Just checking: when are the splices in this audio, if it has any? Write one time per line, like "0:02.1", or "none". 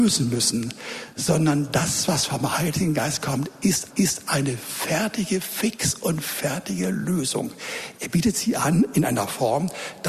0:03.9